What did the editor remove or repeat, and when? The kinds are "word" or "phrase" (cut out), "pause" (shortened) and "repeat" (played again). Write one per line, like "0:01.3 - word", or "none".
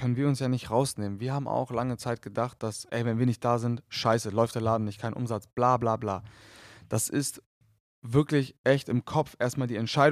none